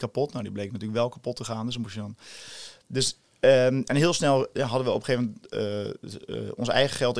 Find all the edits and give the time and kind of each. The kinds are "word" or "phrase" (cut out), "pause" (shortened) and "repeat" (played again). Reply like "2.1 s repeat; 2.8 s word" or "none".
none

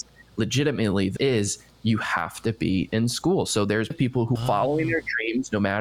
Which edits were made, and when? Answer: 1.2 s word; 3.9 s word; 4.4 s word

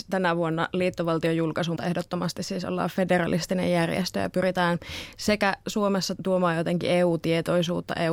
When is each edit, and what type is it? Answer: 1.8 s word; 6.2 s word

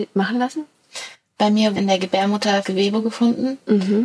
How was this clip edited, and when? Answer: 1.8 s word; 2.6 s word

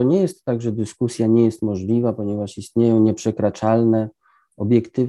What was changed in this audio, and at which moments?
none

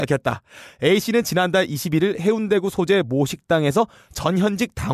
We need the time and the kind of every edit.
none

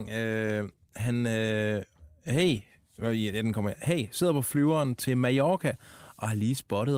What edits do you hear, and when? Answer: none

